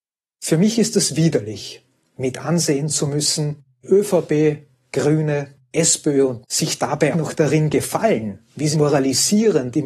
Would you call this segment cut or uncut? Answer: cut